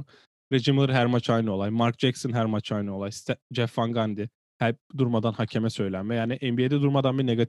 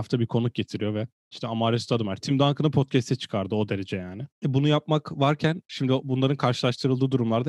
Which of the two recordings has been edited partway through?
second; 1 cut; at 4.3 s

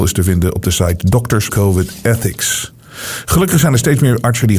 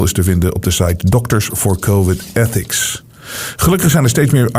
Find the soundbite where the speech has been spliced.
first; 1 cut; at 1.5 s

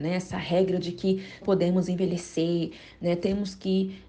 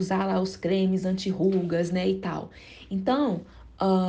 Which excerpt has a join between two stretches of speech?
first; 1 cut; at 1.4 s

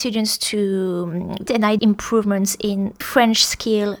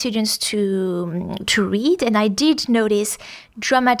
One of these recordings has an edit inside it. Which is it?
first; 3 cuts; at 1.5 s, 1.8 s, 3.0 s

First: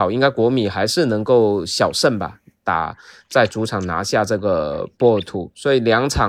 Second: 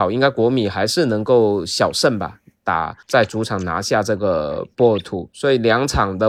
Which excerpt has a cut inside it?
second; 1 cut; at 3.0 s

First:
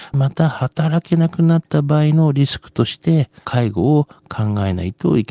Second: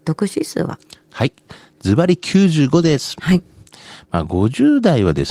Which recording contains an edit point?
first; 1 cut; at 3.4 s

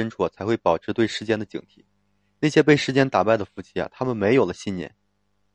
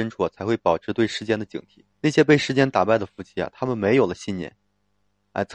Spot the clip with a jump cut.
second; 1 cut; at 1.9 s

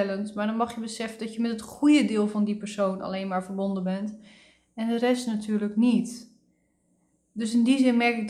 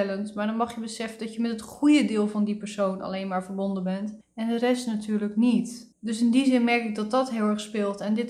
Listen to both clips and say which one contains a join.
second; 2 cuts; at 4.2 s, 5.9 s

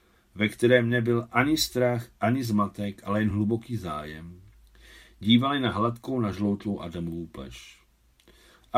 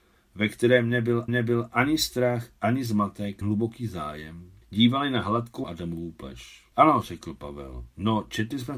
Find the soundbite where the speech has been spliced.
second; 5 cuts; at 1.3 s, 3.4 s, 4.6 s, 5.6 s, 6.7 s

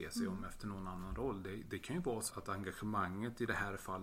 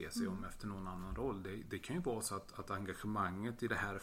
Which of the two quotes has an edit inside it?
first; 1 cut; at 2.3 s

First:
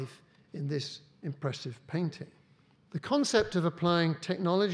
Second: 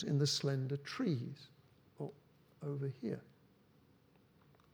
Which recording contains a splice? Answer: first; 1 cut; at 2.7 s

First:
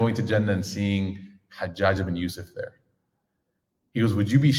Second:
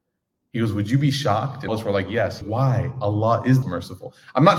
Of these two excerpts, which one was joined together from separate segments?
second; 3 cuts; at 1.7 s, 2.4 s, 3.6 s

